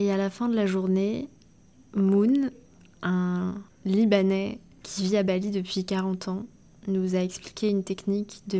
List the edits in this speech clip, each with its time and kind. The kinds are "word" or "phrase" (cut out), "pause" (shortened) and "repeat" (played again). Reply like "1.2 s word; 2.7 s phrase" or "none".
none